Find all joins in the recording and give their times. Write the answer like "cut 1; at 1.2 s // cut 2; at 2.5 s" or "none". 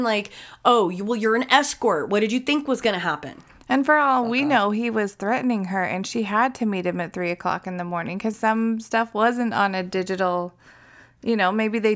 cut 1; at 8.3 s